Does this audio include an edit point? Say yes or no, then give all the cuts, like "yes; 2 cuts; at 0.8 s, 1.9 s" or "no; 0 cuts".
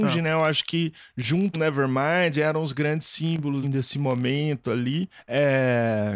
yes; 2 cuts; at 1.5 s, 3.6 s